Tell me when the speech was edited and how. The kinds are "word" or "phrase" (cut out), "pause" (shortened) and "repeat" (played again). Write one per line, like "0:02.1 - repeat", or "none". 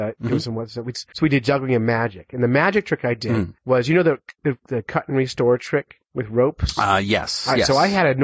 0:01.1 - pause
0:03.6 - pause
0:06.1 - pause